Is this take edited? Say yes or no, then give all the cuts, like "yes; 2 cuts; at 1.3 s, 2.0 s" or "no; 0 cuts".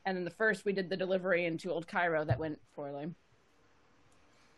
yes; 1 cut; at 2.6 s